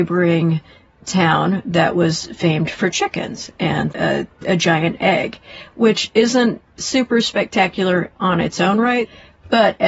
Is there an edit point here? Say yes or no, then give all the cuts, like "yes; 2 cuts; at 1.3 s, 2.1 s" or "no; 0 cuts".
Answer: yes; 1 cut; at 3.9 s